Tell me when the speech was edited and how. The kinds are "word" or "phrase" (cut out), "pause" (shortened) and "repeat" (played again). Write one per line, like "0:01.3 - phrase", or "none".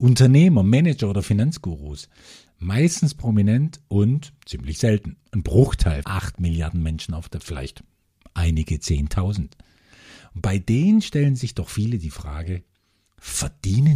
0:06.0 - word
0:07.4 - word